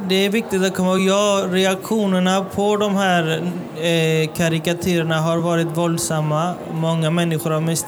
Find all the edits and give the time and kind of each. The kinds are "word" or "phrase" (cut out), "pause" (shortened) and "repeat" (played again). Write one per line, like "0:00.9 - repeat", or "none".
none

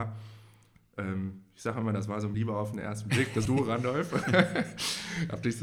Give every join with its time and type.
0:02.3 - word
0:03.5 - word

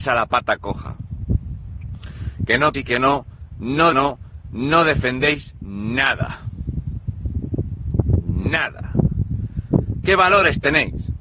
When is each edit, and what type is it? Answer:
0:02.7 - word
0:03.9 - repeat

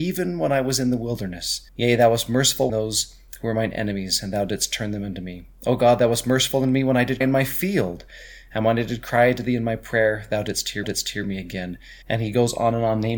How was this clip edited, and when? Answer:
0:01.7 - pause
0:02.7 - phrase
0:07.2 - word
0:10.8 - repeat
0:12.0 - pause

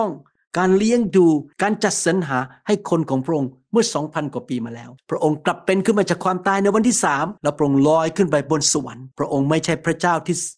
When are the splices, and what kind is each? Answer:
0:01.5 - pause
0:05.0 - pause
0:07.4 - pause
0:09.1 - pause

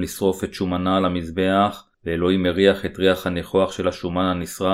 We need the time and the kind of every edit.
0:01.9 - pause

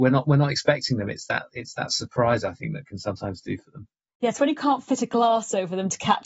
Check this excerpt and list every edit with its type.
none

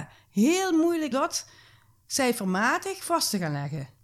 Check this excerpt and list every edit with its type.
0:01.1 - word

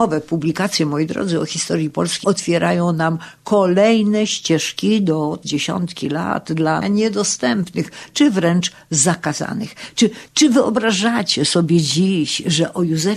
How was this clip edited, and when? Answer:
0:02.2 - phrase
0:05.4 - phrase
0:06.8 - phrase

